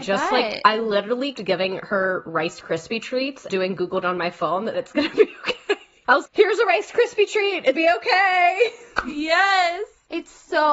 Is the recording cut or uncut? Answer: cut